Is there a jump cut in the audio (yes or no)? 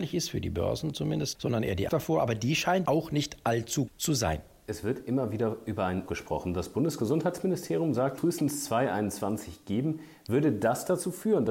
yes